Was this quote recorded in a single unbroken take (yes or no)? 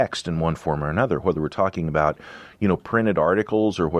yes